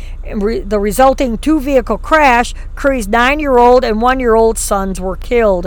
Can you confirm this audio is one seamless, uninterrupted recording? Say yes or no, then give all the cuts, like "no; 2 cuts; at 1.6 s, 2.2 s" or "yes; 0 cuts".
yes; 0 cuts